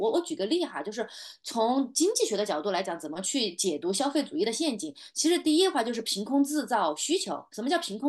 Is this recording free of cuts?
yes; 0 cuts

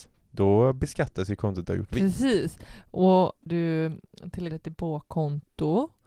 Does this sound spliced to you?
yes; 3 cuts; at 1.6 s, 3.5 s, 4.5 s

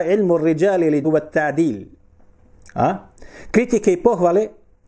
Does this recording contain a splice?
yes; 1 cut; at 1.0 s

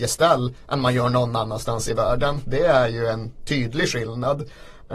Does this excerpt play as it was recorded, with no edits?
yes; 0 cuts

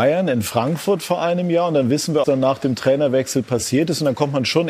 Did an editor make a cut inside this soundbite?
yes; 1 cut; at 2.2 s

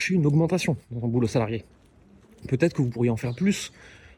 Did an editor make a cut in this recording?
no; 0 cuts

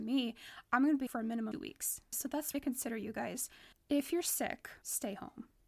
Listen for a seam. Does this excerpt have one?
yes; 4 cuts; at 1.1 s, 1.5 s, 2.5 s, 3.7 s

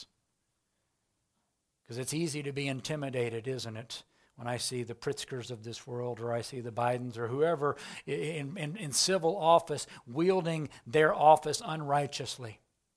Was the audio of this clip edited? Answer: no; 0 cuts

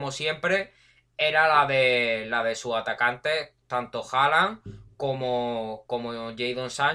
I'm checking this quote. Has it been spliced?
no; 0 cuts

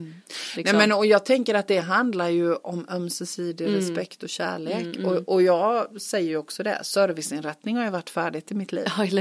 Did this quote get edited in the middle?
no; 0 cuts

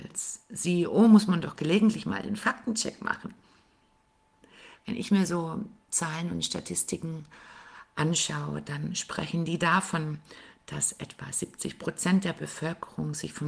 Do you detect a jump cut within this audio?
no; 0 cuts

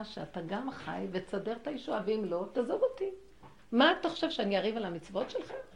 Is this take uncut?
yes; 0 cuts

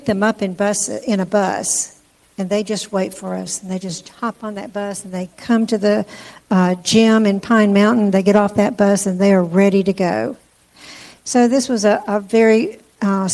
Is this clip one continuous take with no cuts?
yes; 0 cuts

